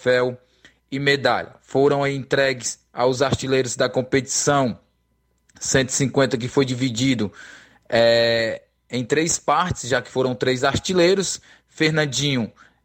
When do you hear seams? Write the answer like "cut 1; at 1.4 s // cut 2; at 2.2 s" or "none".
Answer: none